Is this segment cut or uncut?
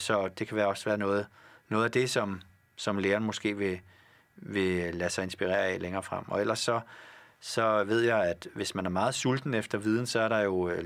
uncut